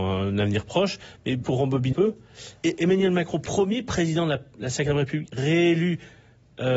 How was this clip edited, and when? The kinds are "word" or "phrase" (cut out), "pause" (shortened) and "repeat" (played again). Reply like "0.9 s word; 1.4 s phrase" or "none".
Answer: 1.4 s word; 1.9 s word